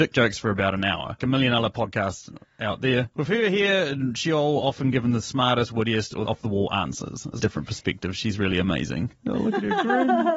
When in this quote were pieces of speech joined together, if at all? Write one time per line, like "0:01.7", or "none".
0:01.2
0:06.3
0:07.4
0:09.2